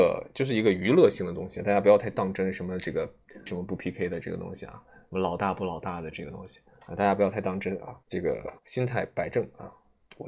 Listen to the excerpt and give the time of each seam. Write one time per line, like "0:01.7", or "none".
0:03.5
0:08.0
0:08.6